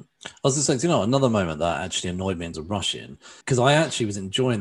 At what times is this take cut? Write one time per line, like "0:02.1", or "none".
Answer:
0:02.5
0:03.4